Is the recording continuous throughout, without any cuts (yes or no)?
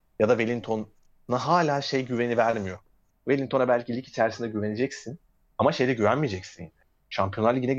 yes